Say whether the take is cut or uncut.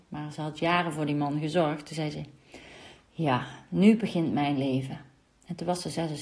uncut